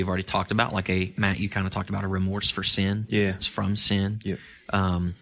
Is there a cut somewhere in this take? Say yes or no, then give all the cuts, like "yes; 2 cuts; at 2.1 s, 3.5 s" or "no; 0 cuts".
yes; 1 cut; at 3.4 s